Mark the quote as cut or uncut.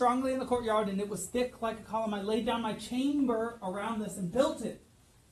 uncut